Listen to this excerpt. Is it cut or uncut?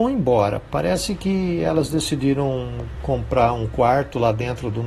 uncut